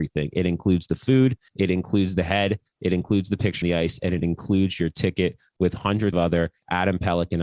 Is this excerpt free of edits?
no; 3 cuts; at 1.5 s, 3.6 s, 6.1 s

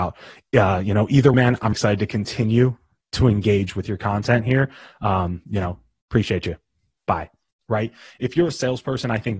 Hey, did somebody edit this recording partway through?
yes; 2 cuts; at 1.3 s, 1.7 s

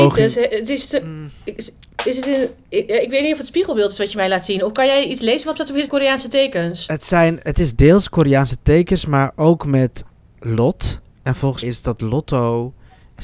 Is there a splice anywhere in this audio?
yes; 3 cuts; at 5.5 s, 5.9 s, 11.6 s

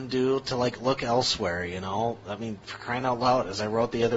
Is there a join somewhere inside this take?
no; 0 cuts

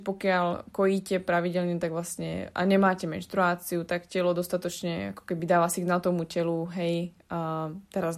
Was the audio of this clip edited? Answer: no; 0 cuts

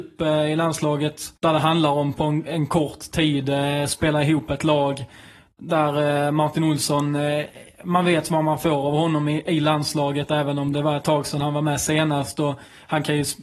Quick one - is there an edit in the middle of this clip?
yes; 1 cut; at 1.4 s

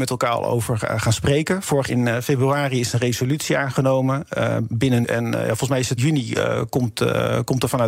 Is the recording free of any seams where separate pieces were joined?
no; 3 cuts; at 1.9 s, 5.0 s, 6.0 s

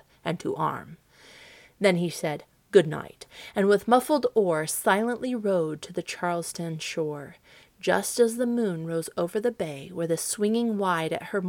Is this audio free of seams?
yes; 0 cuts

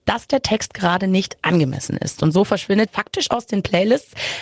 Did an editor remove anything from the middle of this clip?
yes; 1 cut; at 2.9 s

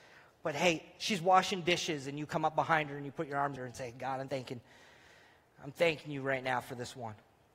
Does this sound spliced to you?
yes; 2 cuts; at 3.6 s, 4.3 s

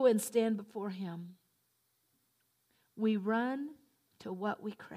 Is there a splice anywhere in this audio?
no; 0 cuts

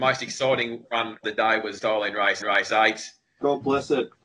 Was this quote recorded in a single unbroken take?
no; 3 cuts; at 1.2 s, 1.8 s, 2.4 s

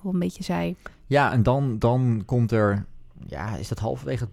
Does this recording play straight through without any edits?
yes; 0 cuts

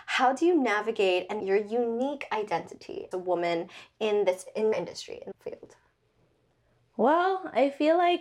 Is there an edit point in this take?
yes; 4 cuts; at 1.4 s, 3.1 s, 4.7 s, 5.3 s

